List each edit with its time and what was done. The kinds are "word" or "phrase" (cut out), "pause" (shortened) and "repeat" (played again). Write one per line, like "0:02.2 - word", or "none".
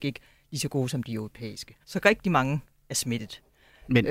0:01.8 - pause